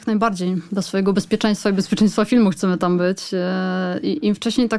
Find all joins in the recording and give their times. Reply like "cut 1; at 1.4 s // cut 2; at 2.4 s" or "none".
none